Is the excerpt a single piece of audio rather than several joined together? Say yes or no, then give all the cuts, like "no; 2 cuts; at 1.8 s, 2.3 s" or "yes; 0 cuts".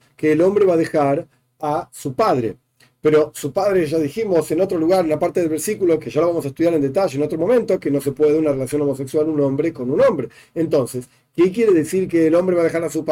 yes; 0 cuts